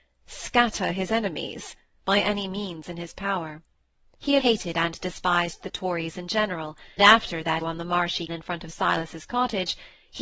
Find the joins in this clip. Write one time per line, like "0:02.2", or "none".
0:04.4
0:07.0
0:07.6
0:08.3